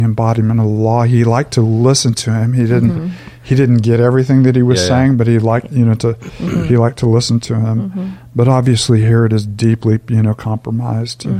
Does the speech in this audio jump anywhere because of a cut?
no; 0 cuts

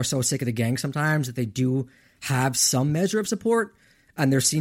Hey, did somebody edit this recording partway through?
no; 0 cuts

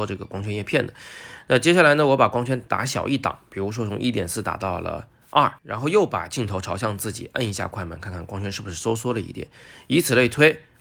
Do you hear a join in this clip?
yes; 1 cut; at 5.6 s

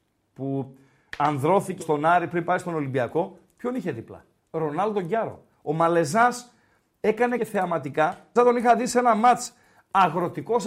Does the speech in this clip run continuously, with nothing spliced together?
no; 4 cuts; at 1.8 s, 4.4 s, 7.4 s, 8.4 s

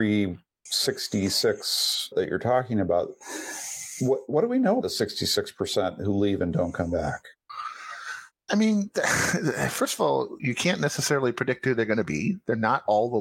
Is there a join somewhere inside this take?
yes; 4 cuts; at 2.1 s, 4.8 s, 8.4 s, 10.4 s

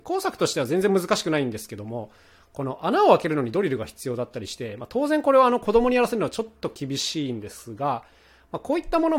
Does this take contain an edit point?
no; 0 cuts

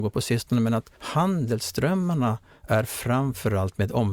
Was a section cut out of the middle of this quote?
yes; 1 cut; at 1.0 s

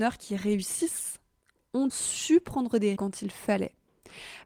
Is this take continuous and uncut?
no; 2 cuts; at 1.9 s, 3.0 s

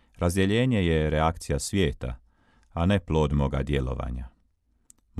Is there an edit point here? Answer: no; 0 cuts

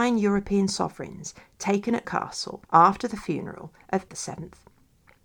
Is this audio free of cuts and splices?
no; 3 cuts; at 2.0 s, 2.6 s, 4.1 s

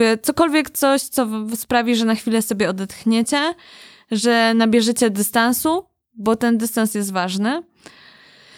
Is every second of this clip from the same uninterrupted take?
yes; 0 cuts

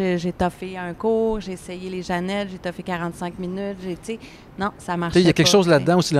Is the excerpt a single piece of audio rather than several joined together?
yes; 0 cuts

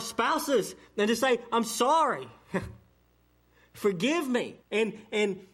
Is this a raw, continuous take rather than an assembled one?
no; 1 cut; at 4.6 s

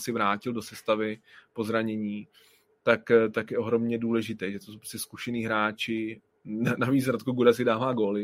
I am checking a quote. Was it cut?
no; 0 cuts

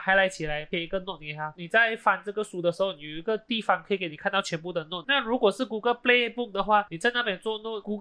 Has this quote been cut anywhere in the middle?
yes; 1 cut; at 5.0 s

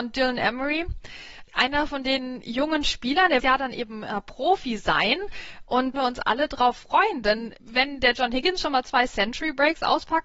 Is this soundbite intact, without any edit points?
no; 4 cuts; at 1.5 s, 3.4 s, 5.9 s, 7.6 s

